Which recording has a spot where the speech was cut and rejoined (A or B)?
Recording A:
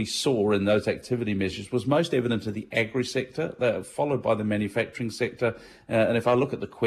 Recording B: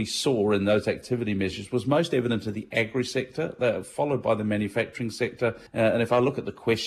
B